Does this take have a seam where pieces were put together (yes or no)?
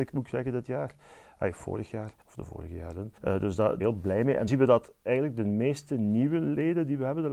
yes